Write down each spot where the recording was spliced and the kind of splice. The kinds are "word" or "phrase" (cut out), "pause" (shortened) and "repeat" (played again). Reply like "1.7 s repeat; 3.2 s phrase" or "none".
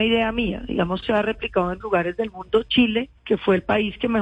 1.0 s phrase; 1.8 s word; 3.2 s pause